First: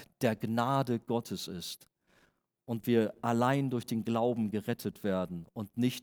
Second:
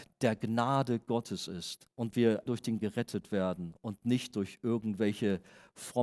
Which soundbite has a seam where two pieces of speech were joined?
second; 3 cuts; at 1.9 s, 2.5 s, 2.8 s

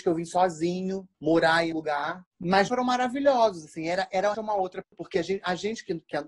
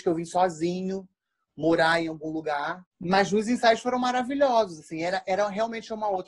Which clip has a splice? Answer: first; 5 cuts; at 1.1 s, 1.7 s, 2.7 s, 4.3 s, 4.8 s

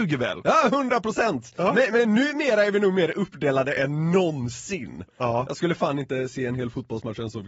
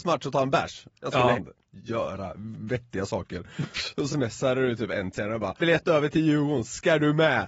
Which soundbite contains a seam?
second; 4 cuts; at 1.3 s, 4.1 s, 5.1 s, 5.6 s

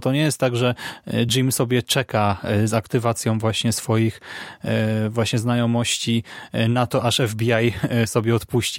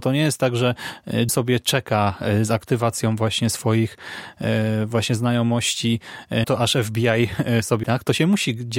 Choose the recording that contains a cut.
second; 3 cuts; at 1.3 s, 6.4 s, 7.8 s

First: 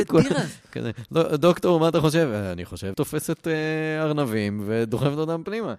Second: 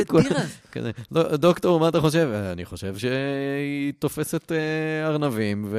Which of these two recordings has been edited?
first; 1 cut; at 2.9 s

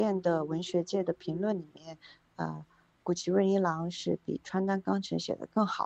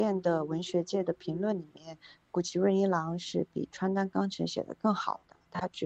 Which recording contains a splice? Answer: second; 1 cut; at 2.1 s

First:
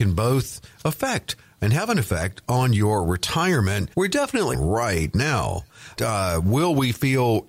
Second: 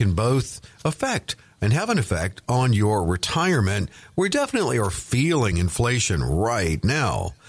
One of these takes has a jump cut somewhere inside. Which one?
first; 3 cuts; at 3.9 s, 4.5 s, 6.0 s

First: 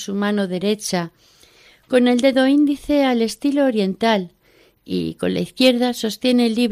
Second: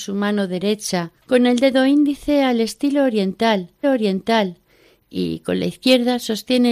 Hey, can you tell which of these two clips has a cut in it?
second; 2 cuts; at 1.2 s, 3.8 s

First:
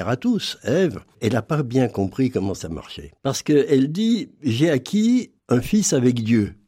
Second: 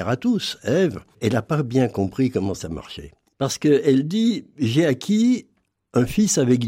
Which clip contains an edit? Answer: first; 2 cuts; at 3.2 s, 5.4 s

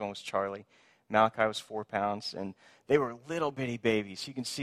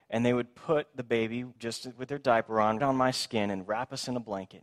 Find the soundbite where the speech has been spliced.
second; 2 cuts; at 1.6 s, 2.8 s

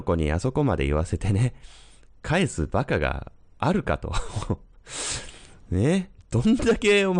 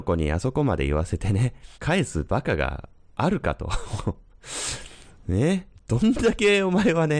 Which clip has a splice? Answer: second; 1 cut; at 1.7 s

